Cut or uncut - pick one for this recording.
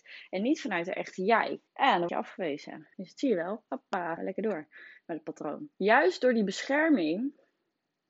cut